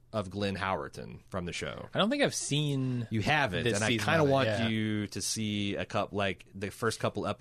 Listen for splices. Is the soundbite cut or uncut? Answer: cut